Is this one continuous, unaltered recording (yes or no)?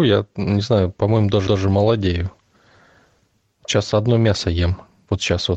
no